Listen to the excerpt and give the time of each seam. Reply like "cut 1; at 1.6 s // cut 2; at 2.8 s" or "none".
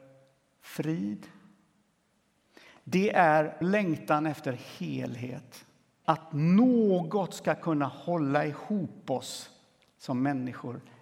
cut 1; at 3.6 s // cut 2; at 6.0 s